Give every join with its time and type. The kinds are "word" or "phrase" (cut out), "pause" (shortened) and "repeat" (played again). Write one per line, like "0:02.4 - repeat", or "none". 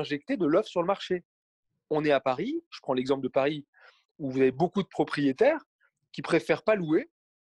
none